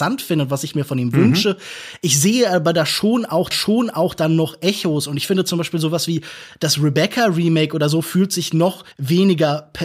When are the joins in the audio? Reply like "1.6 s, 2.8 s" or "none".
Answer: 3.5 s, 8.9 s